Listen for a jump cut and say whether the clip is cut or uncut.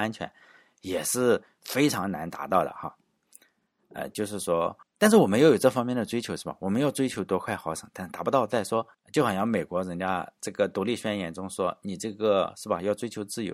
cut